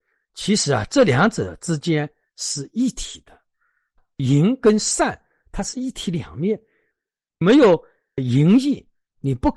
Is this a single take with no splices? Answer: yes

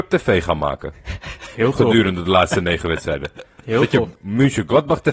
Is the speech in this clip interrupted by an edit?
yes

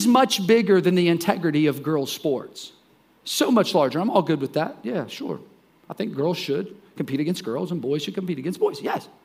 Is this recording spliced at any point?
no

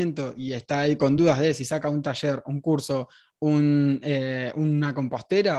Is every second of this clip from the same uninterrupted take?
yes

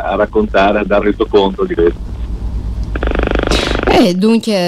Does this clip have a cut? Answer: yes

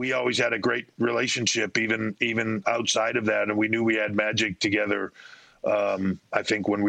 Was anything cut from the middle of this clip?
yes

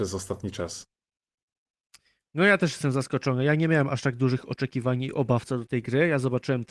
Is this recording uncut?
yes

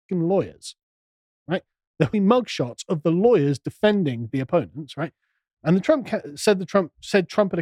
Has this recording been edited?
yes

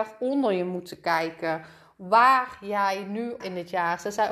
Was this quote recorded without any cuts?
no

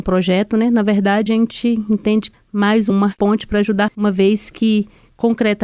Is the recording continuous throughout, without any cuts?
no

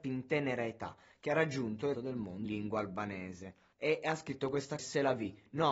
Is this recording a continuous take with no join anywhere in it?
no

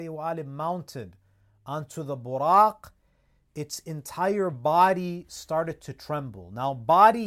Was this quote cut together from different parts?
no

